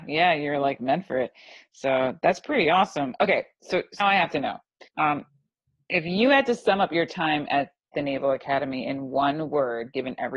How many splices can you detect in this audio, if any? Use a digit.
2